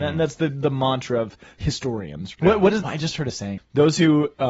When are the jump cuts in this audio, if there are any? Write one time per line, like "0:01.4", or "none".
0:02.3
0:02.8
0:03.6